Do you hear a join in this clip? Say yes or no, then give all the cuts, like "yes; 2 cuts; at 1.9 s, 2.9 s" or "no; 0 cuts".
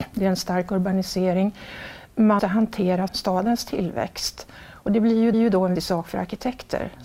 yes; 4 cuts; at 2.4 s, 3.1 s, 5.3 s, 5.8 s